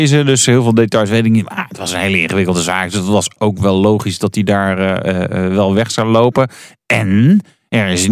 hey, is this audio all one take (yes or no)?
yes